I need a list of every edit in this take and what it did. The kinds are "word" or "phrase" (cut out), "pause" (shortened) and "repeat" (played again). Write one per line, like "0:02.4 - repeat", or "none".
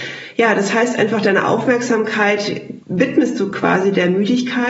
0:02.8 - pause